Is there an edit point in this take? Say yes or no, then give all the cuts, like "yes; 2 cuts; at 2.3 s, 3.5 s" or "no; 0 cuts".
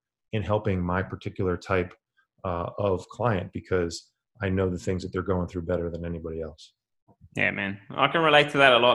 no; 0 cuts